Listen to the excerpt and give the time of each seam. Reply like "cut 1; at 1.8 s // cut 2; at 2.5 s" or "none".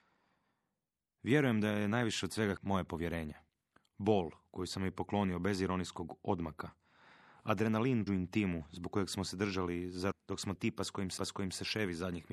cut 1; at 2.6 s // cut 2; at 3.5 s // cut 3; at 8.1 s // cut 4; at 10.1 s // cut 5; at 10.6 s // cut 6; at 11.2 s